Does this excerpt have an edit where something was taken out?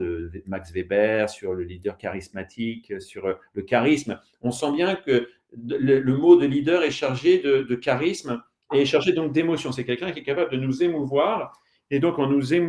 no; 0 cuts

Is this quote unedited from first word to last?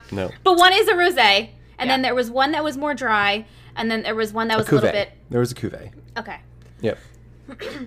yes; 0 cuts

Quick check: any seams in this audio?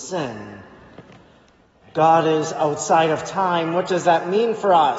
no; 0 cuts

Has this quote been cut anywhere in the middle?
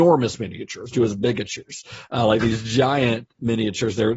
yes; 1 cut; at 0.9 s

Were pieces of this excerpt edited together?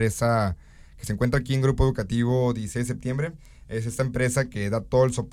no; 0 cuts

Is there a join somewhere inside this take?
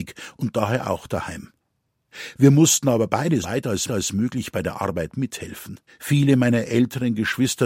yes; 3 cuts; at 3.4 s, 3.9 s, 5.9 s

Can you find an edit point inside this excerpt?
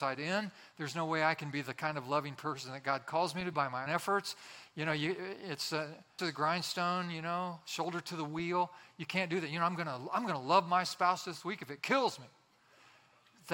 yes; 3 cuts; at 3.5 s, 3.9 s, 6.2 s

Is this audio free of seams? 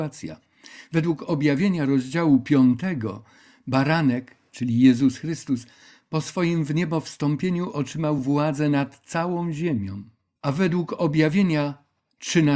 yes; 0 cuts

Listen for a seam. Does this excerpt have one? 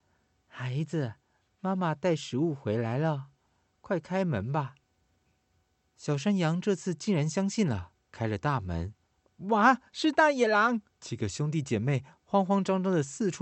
yes; 3 cuts; at 4.8 s, 8.0 s, 10.9 s

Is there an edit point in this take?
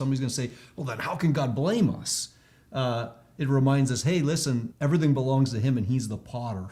yes; 1 cut; at 4.7 s

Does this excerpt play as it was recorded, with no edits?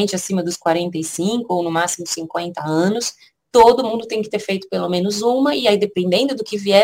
yes; 0 cuts

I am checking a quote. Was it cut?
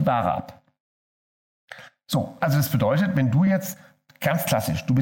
no; 0 cuts

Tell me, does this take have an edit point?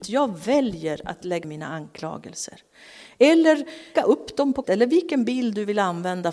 yes; 3 cuts; at 1.4 s, 4.0 s, 4.6 s

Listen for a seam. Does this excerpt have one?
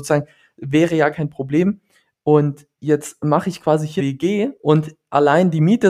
yes; 4 cuts; at 1.1 s, 2.7 s, 4.0 s, 4.6 s

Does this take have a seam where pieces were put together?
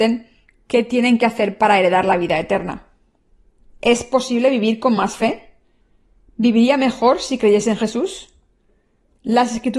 no; 0 cuts

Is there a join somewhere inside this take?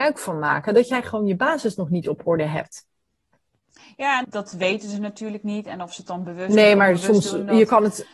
yes; 1 cut; at 4.2 s

